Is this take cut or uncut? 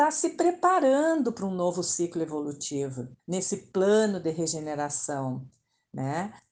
cut